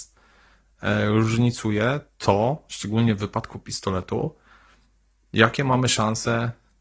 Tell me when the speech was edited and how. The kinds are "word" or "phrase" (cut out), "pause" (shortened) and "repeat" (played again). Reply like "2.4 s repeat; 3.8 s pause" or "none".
none